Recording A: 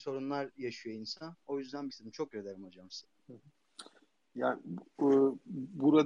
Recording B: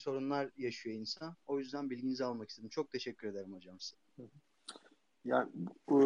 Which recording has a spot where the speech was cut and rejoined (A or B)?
A